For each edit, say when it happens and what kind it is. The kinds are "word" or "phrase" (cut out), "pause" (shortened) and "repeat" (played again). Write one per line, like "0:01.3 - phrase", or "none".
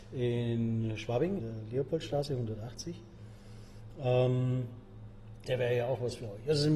0:01.4 - word
0:05.4 - word